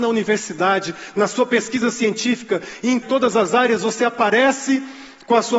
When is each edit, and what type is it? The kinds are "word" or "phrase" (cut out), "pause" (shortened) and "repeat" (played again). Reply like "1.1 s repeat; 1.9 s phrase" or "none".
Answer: 3.0 s phrase